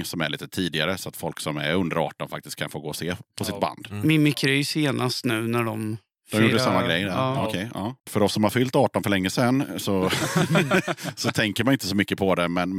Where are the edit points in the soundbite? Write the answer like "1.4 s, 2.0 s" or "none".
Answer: 8.0 s